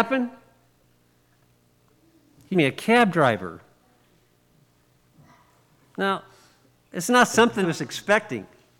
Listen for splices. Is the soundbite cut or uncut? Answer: cut